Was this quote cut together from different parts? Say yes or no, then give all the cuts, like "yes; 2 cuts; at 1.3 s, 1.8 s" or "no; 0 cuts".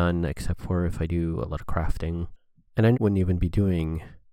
yes; 1 cut; at 2.9 s